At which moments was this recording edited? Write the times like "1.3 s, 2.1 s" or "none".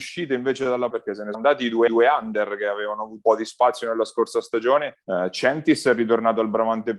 0.9 s, 1.3 s, 1.9 s, 3.2 s, 5.0 s